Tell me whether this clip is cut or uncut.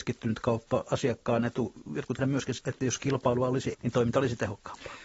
cut